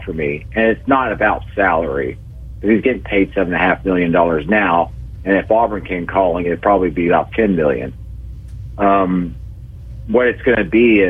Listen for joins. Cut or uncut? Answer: uncut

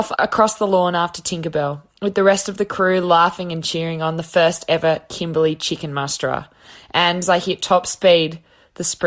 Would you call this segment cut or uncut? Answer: cut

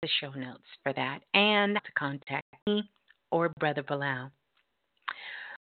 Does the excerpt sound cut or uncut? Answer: cut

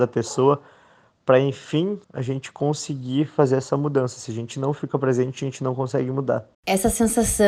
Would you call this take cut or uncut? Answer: cut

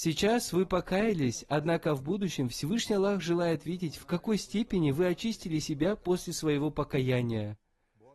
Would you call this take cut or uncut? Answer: uncut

